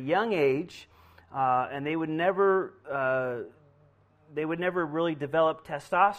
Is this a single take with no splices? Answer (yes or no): yes